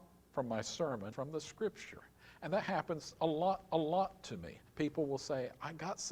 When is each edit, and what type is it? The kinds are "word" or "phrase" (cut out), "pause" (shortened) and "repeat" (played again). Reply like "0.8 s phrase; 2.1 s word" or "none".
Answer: 1.1 s word; 3.7 s repeat; 4.7 s pause